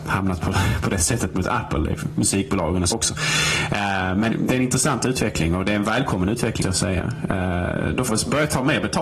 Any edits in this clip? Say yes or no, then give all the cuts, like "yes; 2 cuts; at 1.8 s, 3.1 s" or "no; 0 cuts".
yes; 4 cuts; at 2.9 s, 4.3 s, 6.6 s, 8.1 s